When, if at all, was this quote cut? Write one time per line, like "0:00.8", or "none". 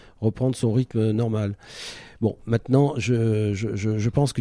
none